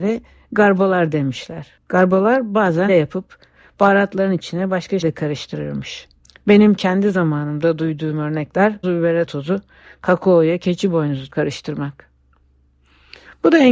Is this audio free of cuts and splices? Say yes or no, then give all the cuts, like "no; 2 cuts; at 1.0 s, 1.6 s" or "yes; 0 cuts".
no; 7 cuts; at 1.8 s, 2.9 s, 5.0 s, 6.2 s, 8.8 s, 9.3 s, 11.3 s